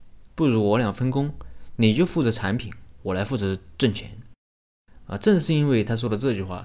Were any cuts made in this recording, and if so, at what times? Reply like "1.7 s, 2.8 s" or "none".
4.4 s